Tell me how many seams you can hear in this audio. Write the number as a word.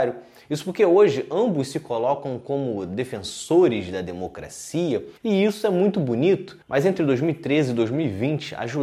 two